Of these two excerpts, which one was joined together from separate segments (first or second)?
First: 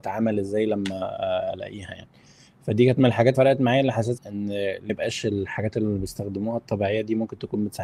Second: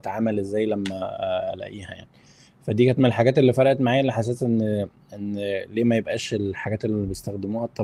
first